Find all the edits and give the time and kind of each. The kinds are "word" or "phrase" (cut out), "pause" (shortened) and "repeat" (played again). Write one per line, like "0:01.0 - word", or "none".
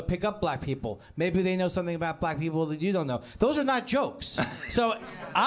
none